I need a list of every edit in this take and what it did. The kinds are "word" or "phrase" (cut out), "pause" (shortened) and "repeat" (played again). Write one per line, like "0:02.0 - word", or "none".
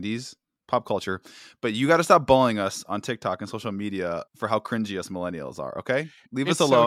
0:04.3 - pause